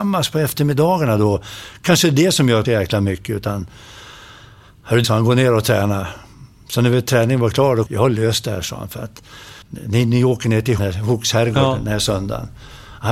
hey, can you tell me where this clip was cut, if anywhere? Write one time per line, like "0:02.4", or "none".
0:02.6
0:05.0
0:07.9
0:09.6
0:10.8